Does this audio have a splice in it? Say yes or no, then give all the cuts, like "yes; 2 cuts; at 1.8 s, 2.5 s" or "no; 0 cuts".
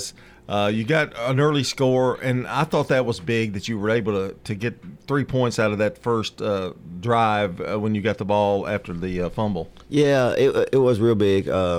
no; 0 cuts